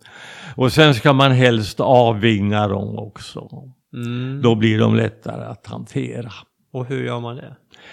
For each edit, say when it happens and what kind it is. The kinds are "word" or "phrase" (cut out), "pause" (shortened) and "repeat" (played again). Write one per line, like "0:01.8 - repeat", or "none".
none